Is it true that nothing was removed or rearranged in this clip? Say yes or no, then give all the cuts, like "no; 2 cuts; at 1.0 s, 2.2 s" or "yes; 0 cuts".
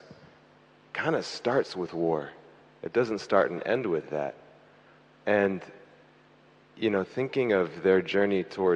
yes; 0 cuts